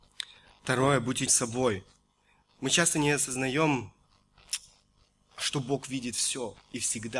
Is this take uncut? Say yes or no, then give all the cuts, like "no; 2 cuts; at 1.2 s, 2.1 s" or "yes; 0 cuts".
no; 1 cut; at 1.3 s